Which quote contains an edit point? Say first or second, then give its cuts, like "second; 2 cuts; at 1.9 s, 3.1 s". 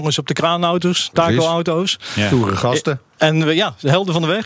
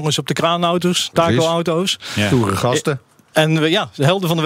first; 1 cut; at 3.1 s